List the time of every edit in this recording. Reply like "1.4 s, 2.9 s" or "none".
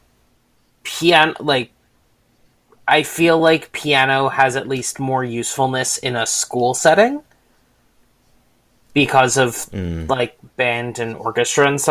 none